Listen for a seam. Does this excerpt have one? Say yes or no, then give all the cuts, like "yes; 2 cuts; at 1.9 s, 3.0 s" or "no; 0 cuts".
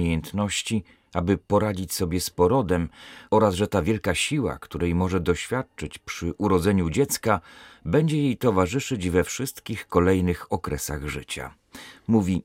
no; 0 cuts